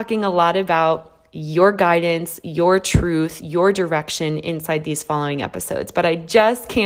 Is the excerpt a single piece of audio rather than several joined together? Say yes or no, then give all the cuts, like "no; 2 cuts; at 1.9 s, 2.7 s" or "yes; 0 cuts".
yes; 0 cuts